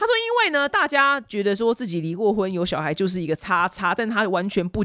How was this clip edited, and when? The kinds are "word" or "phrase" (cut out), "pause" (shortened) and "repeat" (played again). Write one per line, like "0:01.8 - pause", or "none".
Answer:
none